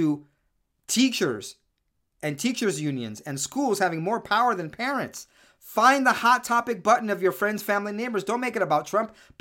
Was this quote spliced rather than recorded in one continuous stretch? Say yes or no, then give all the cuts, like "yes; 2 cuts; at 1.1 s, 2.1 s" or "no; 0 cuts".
no; 0 cuts